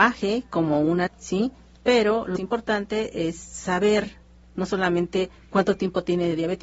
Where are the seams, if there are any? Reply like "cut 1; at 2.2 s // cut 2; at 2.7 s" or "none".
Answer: cut 1; at 1.1 s // cut 2; at 2.4 s

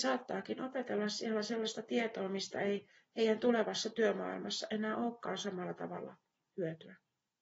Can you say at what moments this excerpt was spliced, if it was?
none

